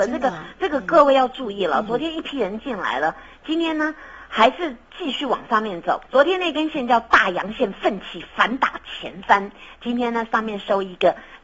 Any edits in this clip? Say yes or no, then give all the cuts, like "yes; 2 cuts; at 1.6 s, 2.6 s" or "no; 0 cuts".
yes; 1 cut; at 6.1 s